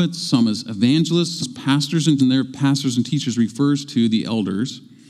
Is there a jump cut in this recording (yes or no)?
yes